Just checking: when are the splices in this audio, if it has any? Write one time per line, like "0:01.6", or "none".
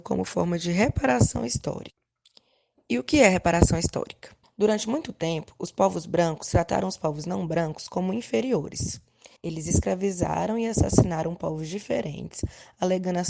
0:04.4
0:09.4

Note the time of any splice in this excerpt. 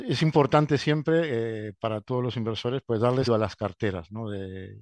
0:03.3

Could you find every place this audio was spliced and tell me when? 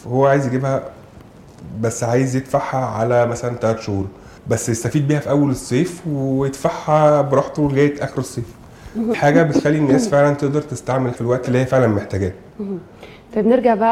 0:04.4
0:09.1
0:11.1
0:11.4

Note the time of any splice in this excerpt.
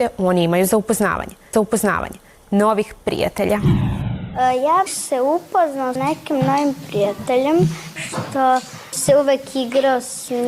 0:01.5
0:04.9
0:06.0
0:08.0
0:08.9

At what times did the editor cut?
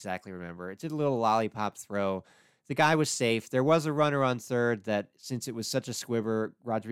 none

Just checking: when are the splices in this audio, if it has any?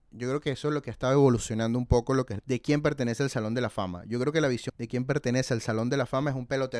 0:02.4
0:04.7

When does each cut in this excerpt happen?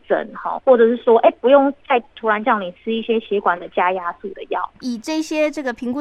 0:01.8

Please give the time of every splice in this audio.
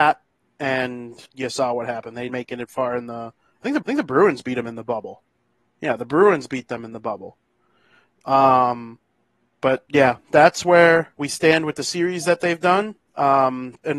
0:01.3
0:02.3
0:03.8
0:11.1

